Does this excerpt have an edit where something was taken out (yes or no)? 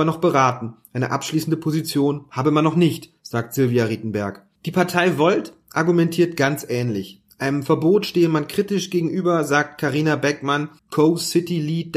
yes